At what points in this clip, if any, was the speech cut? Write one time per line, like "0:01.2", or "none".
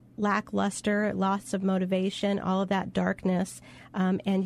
none